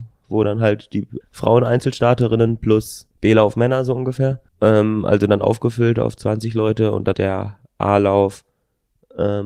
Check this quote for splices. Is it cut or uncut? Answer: cut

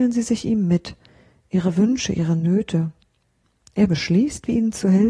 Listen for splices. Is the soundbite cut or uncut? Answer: uncut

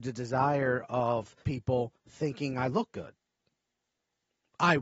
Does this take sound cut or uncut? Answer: cut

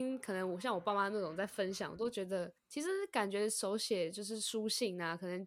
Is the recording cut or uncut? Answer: cut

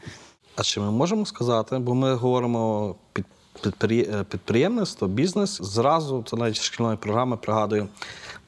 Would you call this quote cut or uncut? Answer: cut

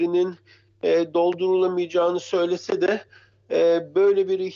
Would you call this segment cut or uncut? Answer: uncut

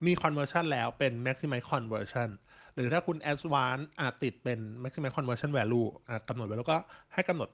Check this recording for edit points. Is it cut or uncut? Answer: uncut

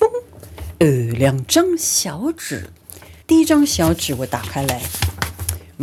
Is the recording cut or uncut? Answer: cut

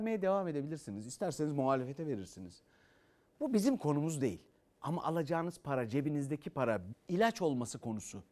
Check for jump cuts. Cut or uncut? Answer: cut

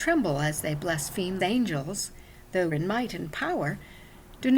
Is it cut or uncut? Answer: cut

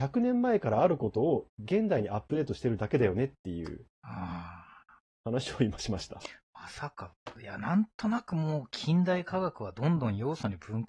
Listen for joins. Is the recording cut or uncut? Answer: uncut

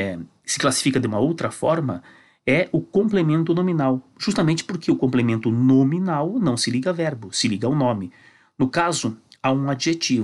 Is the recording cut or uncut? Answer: uncut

